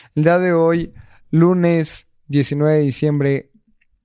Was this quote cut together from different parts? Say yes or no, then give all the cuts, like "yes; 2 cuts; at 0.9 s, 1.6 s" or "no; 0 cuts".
no; 0 cuts